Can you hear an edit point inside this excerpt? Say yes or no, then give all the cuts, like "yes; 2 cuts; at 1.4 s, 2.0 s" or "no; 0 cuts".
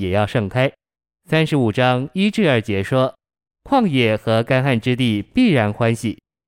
no; 0 cuts